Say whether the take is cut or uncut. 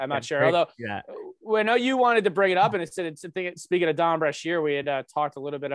uncut